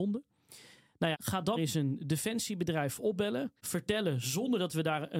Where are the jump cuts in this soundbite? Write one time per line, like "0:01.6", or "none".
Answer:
0:01.1
0:01.6
0:03.6